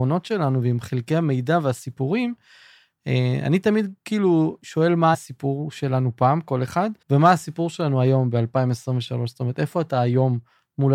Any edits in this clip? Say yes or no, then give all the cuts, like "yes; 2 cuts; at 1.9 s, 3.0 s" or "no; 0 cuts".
yes; 2 cuts; at 5.1 s, 7.0 s